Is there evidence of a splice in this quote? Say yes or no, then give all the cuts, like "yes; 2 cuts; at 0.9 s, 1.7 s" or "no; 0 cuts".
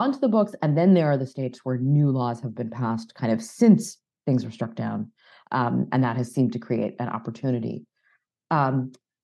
no; 0 cuts